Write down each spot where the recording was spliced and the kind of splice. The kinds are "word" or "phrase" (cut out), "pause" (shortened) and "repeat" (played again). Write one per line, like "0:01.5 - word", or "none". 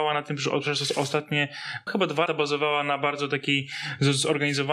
0:01.9 - word
0:02.3 - word